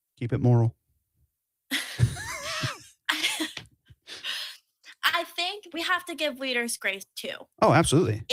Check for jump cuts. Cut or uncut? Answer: cut